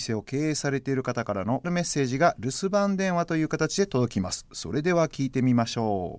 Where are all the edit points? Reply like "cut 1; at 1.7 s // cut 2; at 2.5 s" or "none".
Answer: cut 1; at 1.6 s